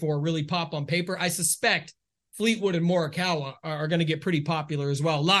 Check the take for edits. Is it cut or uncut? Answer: uncut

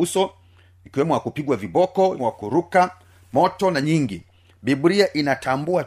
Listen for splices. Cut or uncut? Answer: cut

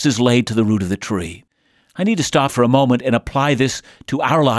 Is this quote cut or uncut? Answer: cut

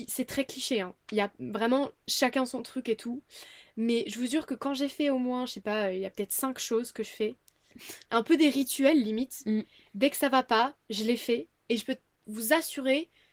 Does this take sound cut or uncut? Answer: uncut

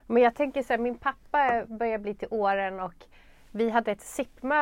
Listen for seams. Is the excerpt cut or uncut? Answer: uncut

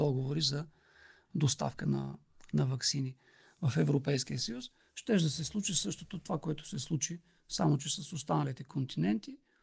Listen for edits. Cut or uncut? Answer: uncut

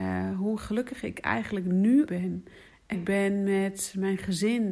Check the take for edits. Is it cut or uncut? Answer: cut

